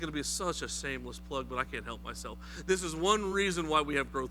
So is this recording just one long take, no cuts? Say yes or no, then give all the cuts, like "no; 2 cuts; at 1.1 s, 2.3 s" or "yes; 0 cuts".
yes; 0 cuts